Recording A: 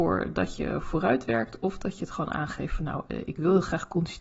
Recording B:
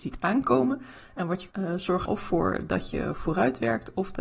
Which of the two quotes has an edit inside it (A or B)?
B